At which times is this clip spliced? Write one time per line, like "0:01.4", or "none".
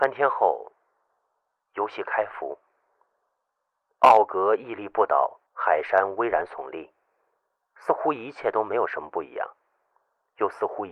0:05.5